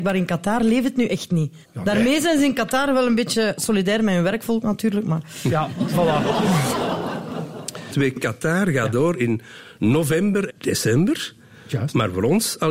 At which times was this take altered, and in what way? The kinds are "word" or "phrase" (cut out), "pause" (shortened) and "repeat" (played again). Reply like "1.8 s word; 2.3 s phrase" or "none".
1.6 s pause; 8.2 s word; 10.5 s word